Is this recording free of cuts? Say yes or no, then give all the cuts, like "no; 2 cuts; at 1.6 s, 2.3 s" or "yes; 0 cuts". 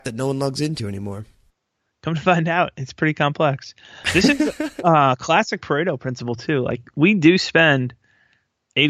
yes; 0 cuts